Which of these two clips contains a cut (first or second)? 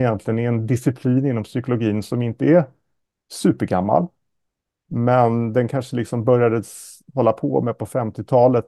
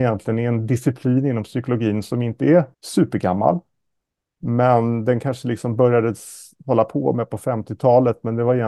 second